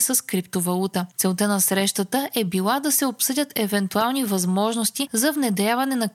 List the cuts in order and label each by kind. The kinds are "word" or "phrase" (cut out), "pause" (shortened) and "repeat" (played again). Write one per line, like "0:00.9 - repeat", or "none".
none